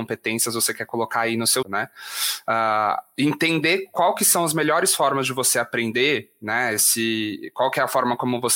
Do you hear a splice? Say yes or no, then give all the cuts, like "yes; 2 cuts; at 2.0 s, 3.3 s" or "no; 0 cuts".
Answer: yes; 1 cut; at 1.6 s